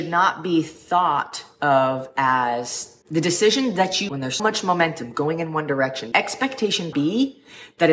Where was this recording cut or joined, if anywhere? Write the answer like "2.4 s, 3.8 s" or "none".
3.0 s, 4.1 s, 4.4 s, 6.1 s, 6.9 s